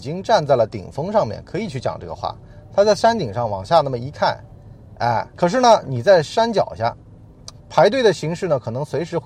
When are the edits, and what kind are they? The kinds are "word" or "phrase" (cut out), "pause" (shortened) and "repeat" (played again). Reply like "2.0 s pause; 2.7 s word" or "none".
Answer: 5.3 s pause; 7.6 s pause